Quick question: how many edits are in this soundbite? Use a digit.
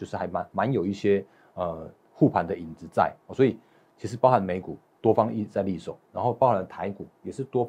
1